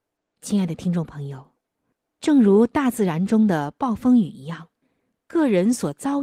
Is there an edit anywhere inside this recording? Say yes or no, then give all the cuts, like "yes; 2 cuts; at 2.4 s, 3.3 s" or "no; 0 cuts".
yes; 2 cuts; at 1.9 s, 4.8 s